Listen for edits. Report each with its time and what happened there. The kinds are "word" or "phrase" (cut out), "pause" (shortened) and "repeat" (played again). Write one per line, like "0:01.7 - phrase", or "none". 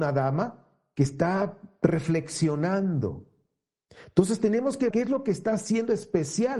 0:04.9 - word